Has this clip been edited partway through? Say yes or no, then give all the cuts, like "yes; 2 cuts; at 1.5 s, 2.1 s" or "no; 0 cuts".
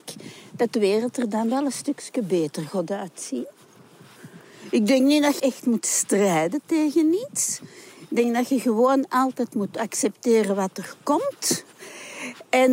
yes; 1 cut; at 5.4 s